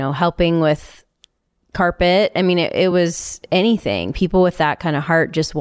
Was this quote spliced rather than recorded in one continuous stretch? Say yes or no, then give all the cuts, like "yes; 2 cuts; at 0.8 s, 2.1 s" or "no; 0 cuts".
no; 0 cuts